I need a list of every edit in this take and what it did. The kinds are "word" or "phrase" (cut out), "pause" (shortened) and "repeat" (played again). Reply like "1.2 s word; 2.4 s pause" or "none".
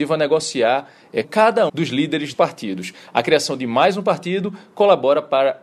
1.2 s word; 1.7 s word; 2.3 s word